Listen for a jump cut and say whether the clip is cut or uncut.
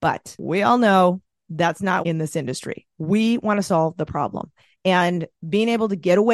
cut